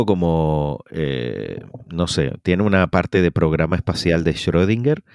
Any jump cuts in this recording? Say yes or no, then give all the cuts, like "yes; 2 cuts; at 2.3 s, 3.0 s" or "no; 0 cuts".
no; 0 cuts